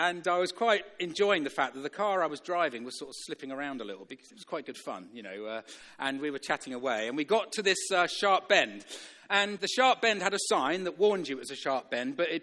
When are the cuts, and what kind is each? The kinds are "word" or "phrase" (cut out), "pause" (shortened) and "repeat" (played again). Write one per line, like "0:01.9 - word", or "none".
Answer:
0:04.1 - word
0:09.6 - word

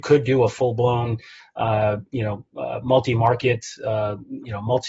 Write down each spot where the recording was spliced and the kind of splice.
none

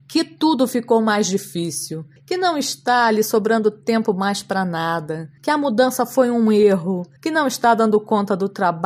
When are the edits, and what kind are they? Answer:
0:02.2 - pause
0:05.4 - pause
0:07.2 - pause

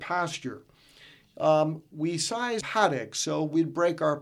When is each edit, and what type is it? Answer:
0:02.6 - phrase

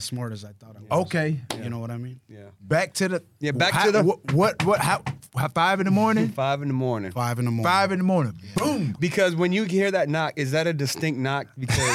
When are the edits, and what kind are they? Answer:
none

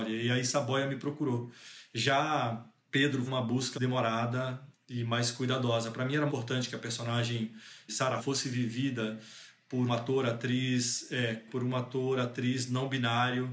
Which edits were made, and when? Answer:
0:03.3 - word
0:03.7 - word
0:06.3 - word
0:07.9 - word
0:08.2 - word
0:09.9 - word
0:11.5 - word

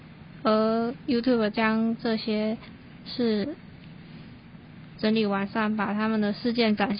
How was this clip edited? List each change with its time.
0:01.5 - word

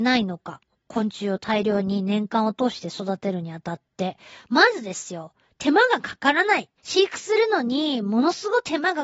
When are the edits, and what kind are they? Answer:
0:06.8 - pause

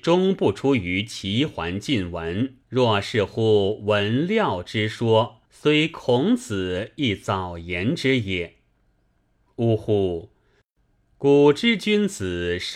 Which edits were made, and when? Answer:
0:02.6 - pause
0:05.5 - pause

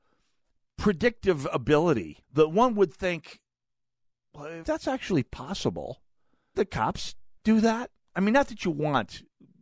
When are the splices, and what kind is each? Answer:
0:02.2 - pause
0:04.6 - word
0:06.5 - word
0:07.4 - pause

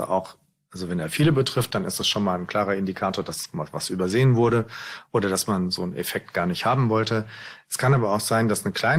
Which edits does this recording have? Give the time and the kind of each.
none

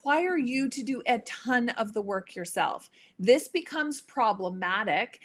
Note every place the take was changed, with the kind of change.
none

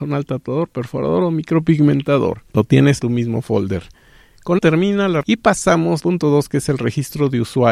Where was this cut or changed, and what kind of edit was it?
0:02.5 - pause
0:03.0 - word
0:04.6 - word
0:05.2 - phrase
0:06.0 - word

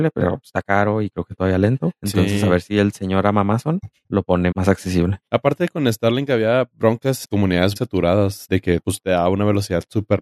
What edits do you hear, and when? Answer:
0:02.0 - pause
0:04.5 - word
0:05.3 - pause
0:07.2 - word
0:07.8 - word

